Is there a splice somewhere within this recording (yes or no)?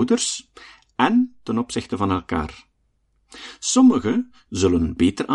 no